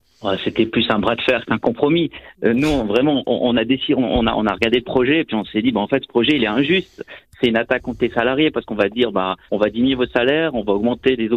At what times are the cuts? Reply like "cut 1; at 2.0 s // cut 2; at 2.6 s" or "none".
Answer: cut 1; at 9.5 s